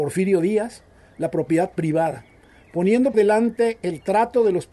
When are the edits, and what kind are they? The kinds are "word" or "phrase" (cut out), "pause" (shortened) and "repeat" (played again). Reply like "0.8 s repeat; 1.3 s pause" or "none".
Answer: 3.1 s word